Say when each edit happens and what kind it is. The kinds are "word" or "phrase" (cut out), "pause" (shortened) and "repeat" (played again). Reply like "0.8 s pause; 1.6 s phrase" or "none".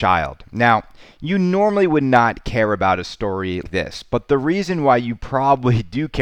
3.6 s word